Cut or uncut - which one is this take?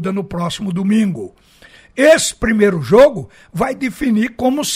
uncut